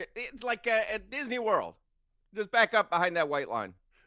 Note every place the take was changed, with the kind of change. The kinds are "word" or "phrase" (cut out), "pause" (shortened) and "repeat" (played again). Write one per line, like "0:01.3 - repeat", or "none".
none